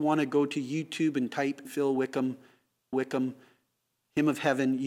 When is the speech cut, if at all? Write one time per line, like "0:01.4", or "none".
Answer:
0:01.6
0:02.9